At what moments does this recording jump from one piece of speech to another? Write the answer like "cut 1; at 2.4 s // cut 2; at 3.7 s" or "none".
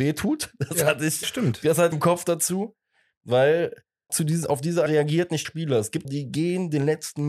cut 1; at 1.2 s // cut 2; at 1.9 s // cut 3; at 4.1 s // cut 4; at 4.9 s // cut 5; at 5.4 s // cut 6; at 6.0 s